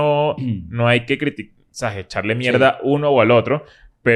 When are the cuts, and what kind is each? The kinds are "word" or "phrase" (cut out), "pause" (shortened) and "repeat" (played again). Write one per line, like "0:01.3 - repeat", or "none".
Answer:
none